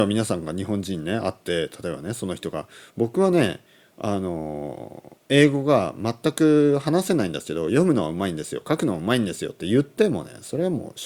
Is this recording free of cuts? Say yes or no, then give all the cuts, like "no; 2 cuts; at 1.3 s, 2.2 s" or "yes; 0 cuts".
no; 1 cut; at 5.2 s